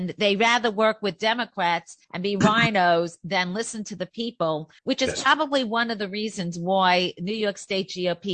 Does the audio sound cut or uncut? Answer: cut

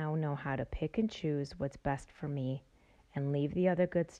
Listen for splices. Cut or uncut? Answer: uncut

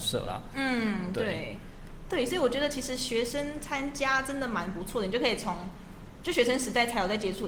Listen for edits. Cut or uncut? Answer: uncut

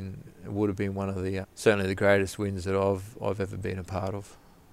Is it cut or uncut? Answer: cut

